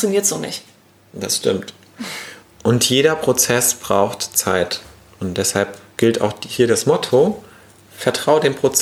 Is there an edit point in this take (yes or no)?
no